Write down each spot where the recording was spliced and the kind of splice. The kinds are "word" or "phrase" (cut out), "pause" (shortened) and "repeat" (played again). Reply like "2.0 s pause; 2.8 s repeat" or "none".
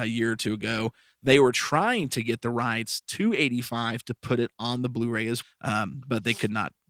5.4 s word